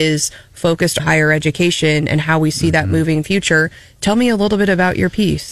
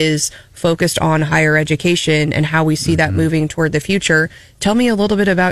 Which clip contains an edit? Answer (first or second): first